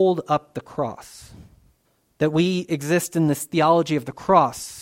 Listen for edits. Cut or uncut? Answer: cut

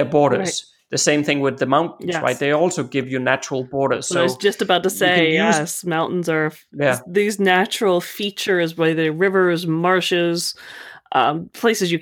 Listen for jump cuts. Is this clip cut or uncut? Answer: uncut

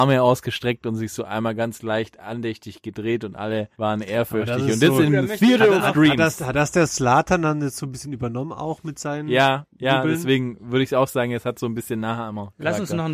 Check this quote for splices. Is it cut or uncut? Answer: cut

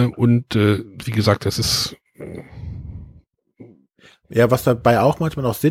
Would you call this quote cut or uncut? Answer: uncut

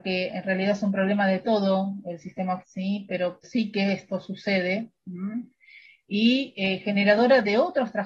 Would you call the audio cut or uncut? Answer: cut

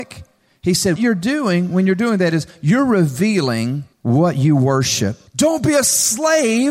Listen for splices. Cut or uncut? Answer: cut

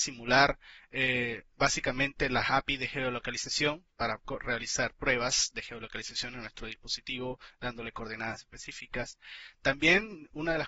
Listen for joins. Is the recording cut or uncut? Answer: cut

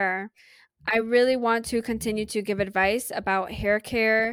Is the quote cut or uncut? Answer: uncut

